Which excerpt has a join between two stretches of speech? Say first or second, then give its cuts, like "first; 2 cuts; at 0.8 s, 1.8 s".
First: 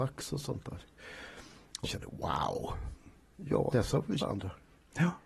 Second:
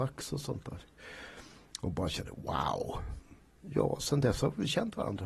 first; 3 cuts; at 1.8 s, 3.7 s, 4.2 s